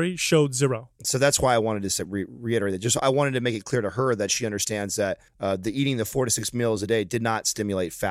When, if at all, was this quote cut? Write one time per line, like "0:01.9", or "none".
0:05.3